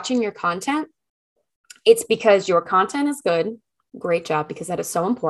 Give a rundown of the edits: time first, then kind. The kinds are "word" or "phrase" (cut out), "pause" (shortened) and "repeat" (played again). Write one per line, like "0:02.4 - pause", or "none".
none